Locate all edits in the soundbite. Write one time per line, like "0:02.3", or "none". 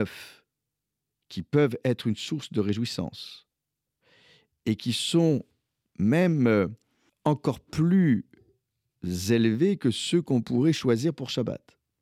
0:07.1

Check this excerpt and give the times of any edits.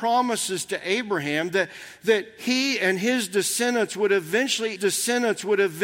0:04.8

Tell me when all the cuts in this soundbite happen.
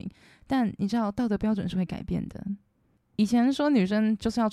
none

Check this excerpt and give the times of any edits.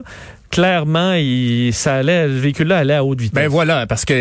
none

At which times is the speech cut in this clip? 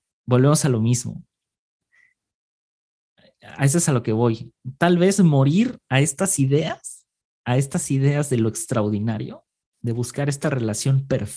none

